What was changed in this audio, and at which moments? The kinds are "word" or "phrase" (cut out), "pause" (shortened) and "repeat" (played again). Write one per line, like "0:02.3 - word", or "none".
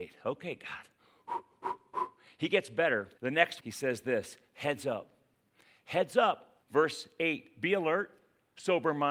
0:03.2 - pause
0:03.6 - word
0:06.6 - pause